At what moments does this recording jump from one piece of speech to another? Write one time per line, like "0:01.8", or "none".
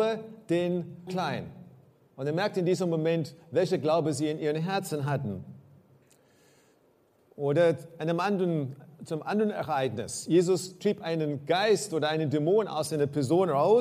0:01.1